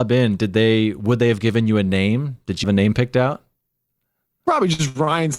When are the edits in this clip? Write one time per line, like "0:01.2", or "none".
0:02.6